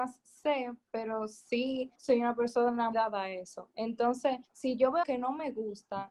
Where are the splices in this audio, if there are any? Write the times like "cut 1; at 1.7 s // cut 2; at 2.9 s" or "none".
cut 1; at 2.0 s // cut 2; at 2.9 s // cut 3; at 4.4 s // cut 4; at 5.0 s